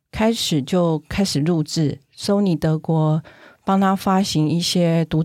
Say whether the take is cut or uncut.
uncut